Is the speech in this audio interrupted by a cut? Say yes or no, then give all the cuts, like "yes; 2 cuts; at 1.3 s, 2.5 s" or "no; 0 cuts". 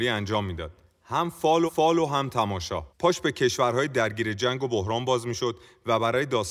yes; 2 cuts; at 1.7 s, 2.9 s